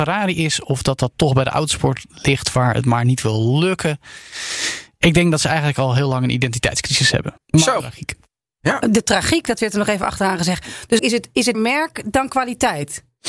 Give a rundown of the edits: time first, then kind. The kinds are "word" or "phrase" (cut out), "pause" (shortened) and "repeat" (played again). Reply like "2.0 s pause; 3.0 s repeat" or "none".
7.4 s pause; 7.8 s word; 11.0 s word; 11.5 s word